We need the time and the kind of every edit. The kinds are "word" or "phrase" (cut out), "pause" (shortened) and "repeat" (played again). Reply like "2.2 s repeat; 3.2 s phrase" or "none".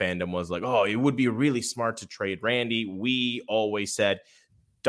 none